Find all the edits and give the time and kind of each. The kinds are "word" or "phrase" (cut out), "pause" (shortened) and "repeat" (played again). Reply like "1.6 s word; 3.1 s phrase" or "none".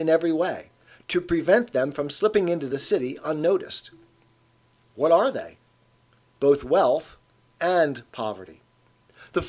none